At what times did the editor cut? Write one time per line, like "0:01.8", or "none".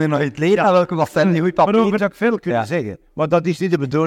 0:02.0